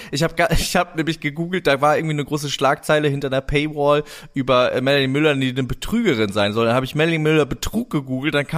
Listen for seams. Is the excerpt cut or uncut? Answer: uncut